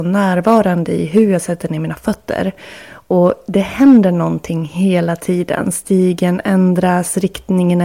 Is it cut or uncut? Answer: uncut